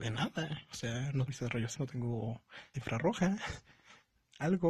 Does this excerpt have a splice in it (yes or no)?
yes